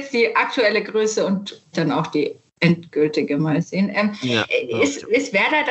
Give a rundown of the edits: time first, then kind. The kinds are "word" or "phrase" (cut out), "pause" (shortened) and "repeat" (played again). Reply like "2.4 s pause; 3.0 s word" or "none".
1.7 s word